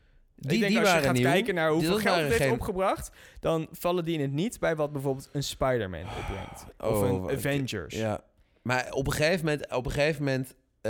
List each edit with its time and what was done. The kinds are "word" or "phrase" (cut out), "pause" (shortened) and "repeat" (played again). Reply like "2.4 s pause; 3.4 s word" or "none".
none